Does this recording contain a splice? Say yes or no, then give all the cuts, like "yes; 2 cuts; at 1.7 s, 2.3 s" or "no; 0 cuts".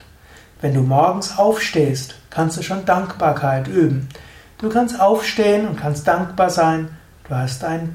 no; 0 cuts